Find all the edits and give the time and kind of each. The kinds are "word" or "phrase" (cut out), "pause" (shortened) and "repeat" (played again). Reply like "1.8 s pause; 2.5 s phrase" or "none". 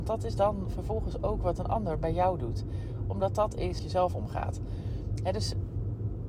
3.8 s phrase